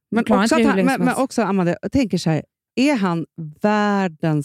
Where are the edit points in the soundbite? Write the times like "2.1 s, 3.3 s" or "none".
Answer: none